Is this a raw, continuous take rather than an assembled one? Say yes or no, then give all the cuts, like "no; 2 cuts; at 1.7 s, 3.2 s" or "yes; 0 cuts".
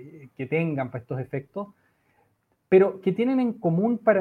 yes; 0 cuts